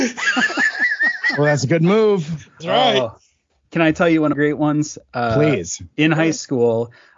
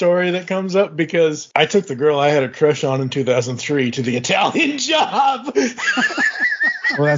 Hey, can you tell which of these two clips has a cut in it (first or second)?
first